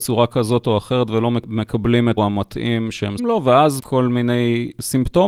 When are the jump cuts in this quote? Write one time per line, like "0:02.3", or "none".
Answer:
0:02.2
0:03.2
0:03.8